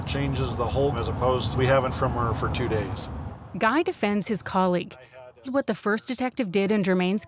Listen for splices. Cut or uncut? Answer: cut